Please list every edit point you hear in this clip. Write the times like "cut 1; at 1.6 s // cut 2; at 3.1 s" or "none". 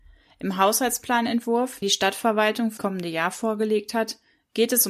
cut 1; at 1.8 s // cut 2; at 2.8 s

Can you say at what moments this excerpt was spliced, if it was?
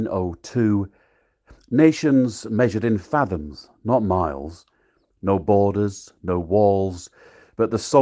none

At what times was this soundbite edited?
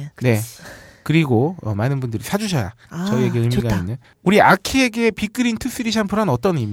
cut 1; at 4.0 s

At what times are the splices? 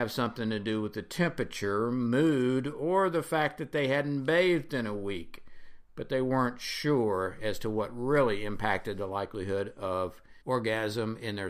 cut 1; at 10.4 s

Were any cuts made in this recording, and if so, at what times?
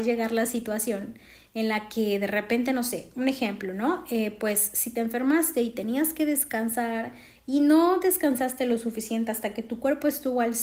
none

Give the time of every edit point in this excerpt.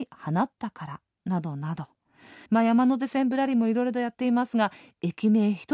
cut 1; at 2.5 s

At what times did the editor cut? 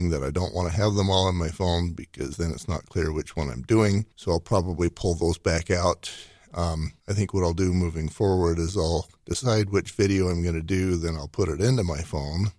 cut 1; at 4.1 s // cut 2; at 7.0 s // cut 3; at 9.2 s

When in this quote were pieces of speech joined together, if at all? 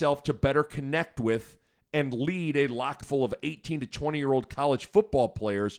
cut 1; at 3.0 s

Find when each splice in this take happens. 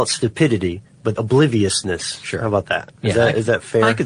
cut 1; at 1.2 s

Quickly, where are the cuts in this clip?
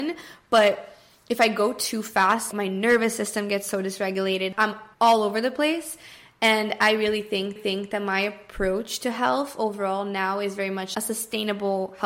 cut 1; at 4.9 s // cut 2; at 7.6 s

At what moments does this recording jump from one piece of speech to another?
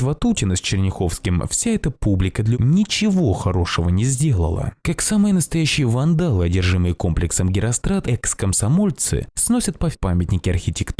cut 1; at 2.5 s // cut 2; at 4.8 s // cut 3; at 8.0 s // cut 4; at 9.9 s

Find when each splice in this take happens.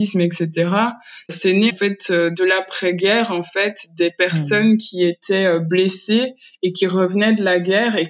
cut 1; at 1.3 s // cut 2; at 1.7 s

